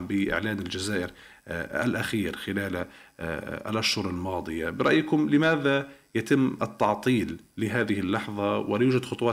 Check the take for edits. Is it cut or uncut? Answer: uncut